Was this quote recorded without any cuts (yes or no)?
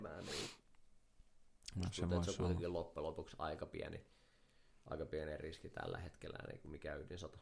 yes